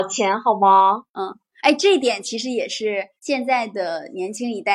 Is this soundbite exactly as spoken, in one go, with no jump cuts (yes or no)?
no